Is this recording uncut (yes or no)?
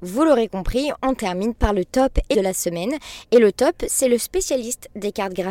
no